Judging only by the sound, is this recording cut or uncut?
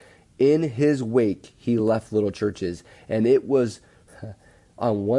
uncut